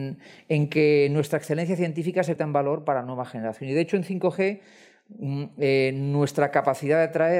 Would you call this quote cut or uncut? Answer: cut